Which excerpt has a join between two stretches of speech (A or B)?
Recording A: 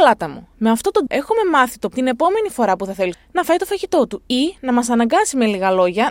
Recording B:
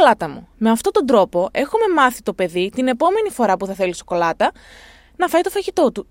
A